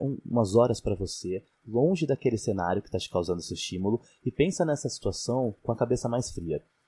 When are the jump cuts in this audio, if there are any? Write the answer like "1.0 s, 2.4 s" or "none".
none